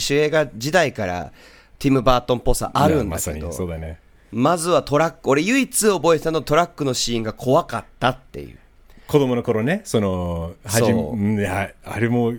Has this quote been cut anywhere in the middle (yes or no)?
no